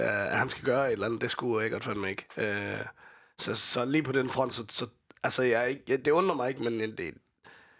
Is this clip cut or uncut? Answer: uncut